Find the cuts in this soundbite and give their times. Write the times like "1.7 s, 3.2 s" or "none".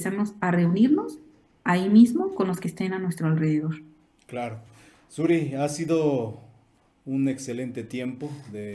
none